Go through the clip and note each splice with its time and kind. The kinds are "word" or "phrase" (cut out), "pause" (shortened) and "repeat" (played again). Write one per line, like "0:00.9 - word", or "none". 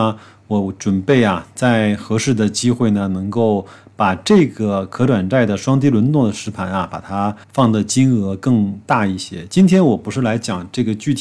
0:07.4 - pause